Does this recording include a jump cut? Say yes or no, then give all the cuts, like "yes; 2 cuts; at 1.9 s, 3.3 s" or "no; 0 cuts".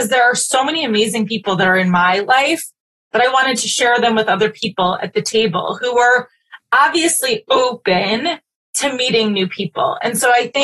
no; 0 cuts